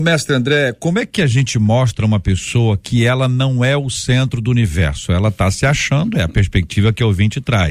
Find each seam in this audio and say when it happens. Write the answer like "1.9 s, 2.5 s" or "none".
none